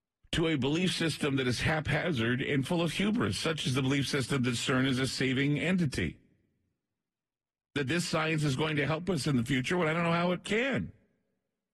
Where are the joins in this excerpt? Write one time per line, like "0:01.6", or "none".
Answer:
none